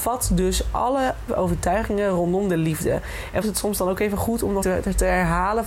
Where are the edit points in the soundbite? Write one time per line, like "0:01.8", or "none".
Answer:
0:01.3
0:03.4
0:04.6

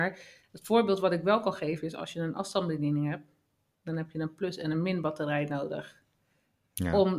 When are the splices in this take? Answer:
none

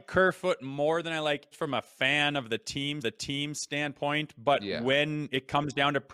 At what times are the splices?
0:01.5
0:03.0

